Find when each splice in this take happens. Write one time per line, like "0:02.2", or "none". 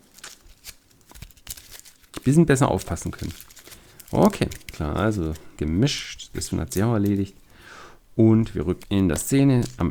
0:02.2
0:04.7
0:05.6
0:06.5
0:08.8